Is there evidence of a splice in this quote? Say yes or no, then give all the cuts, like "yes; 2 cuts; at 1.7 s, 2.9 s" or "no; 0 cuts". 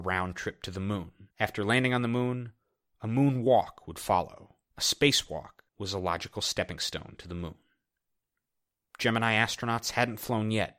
yes; 3 cuts; at 1.3 s, 4.6 s, 5.7 s